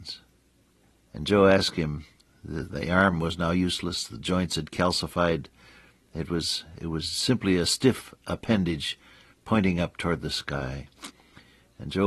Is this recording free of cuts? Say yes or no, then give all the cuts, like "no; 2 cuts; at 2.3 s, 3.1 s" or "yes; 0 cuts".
yes; 0 cuts